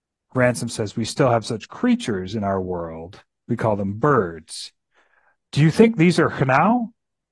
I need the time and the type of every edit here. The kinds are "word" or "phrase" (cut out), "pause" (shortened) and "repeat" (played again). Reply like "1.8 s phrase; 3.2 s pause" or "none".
none